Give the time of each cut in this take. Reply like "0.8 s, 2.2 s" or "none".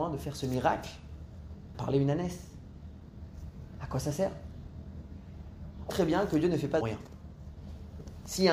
1.7 s, 5.9 s, 6.8 s